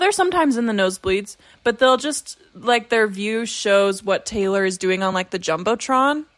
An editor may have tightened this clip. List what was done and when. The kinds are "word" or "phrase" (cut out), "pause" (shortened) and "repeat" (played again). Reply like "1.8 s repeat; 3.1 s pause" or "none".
none